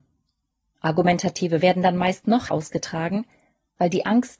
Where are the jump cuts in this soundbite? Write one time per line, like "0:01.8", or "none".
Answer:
0:01.6
0:02.5